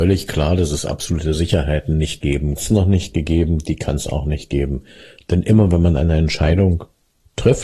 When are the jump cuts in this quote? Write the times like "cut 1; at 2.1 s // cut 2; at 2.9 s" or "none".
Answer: cut 1; at 2.6 s